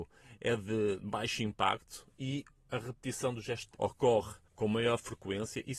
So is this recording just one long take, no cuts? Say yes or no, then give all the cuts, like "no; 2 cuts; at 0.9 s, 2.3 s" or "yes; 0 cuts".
no; 2 cuts; at 3.7 s, 4.4 s